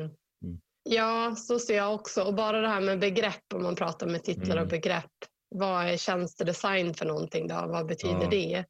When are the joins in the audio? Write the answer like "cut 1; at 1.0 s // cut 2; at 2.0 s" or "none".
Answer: cut 1; at 5.3 s